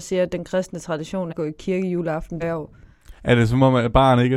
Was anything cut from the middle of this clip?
yes; 3 cuts; at 1.3 s, 2.4 s, 3.2 s

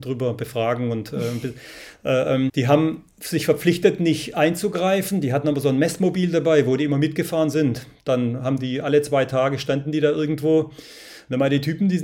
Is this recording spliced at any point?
yes; 1 cut; at 2.5 s

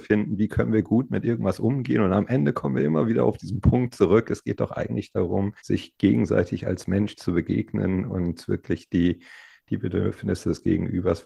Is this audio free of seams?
no; 1 cut; at 5.6 s

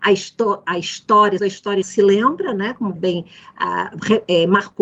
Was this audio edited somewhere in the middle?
yes; 3 cuts; at 1.4 s, 1.8 s, 3.0 s

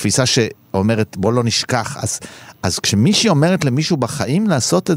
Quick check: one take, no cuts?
yes; 0 cuts

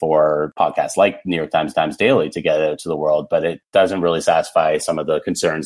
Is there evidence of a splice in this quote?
yes; 1 cut; at 1.7 s

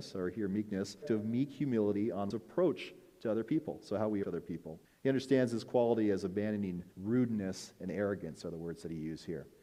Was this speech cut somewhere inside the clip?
yes; 5 cuts; at 1.0 s, 2.3 s, 4.2 s, 4.8 s, 6.9 s

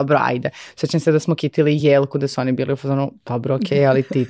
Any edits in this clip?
no; 0 cuts

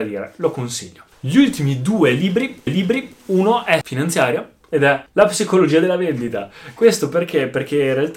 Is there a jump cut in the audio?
yes; 2 cuts; at 2.7 s, 3.8 s

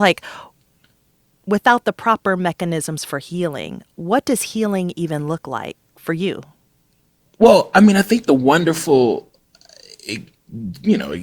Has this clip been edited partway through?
no; 0 cuts

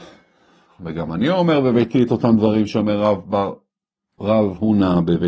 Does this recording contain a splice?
no; 0 cuts

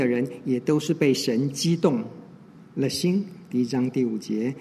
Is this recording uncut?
yes; 0 cuts

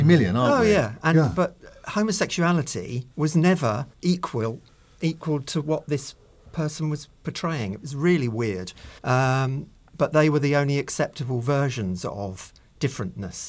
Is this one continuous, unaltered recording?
no; 4 cuts; at 3.1 s, 3.9 s, 7.2 s, 9.0 s

